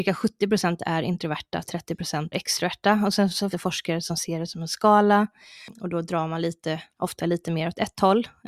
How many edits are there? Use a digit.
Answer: 2